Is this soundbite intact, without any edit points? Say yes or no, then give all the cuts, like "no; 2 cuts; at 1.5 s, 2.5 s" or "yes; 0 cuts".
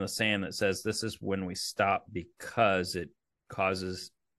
yes; 0 cuts